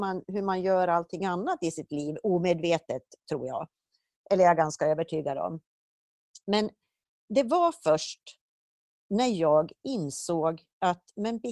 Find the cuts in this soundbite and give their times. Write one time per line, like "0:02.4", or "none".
none

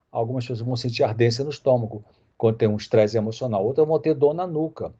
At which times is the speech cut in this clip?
none

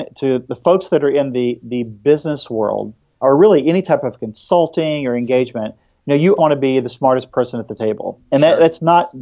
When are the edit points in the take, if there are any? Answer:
0:03.2
0:06.4

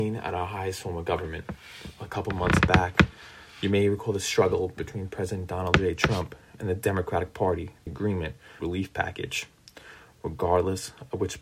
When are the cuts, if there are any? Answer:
0:07.9
0:08.6

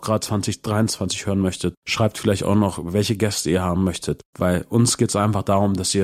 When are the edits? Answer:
0:01.8

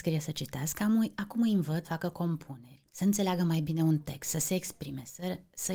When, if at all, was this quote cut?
0:01.8
0:02.9

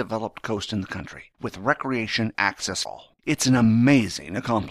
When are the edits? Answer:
0:01.3
0:02.3
0:02.9
0:03.2

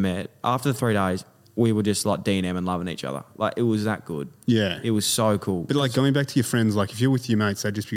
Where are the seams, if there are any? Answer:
none

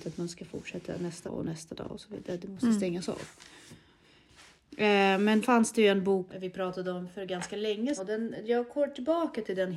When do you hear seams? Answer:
0:01.3
0:05.4
0:06.3
0:08.0

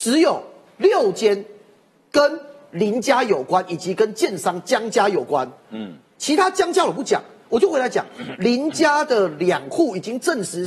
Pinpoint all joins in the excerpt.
none

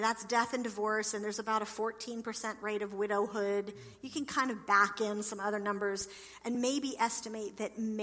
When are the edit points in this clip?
none

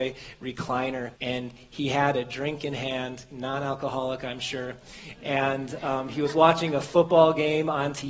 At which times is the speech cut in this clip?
0:01.2

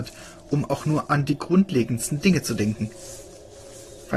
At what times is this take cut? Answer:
none

